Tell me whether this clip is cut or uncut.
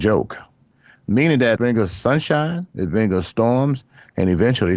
cut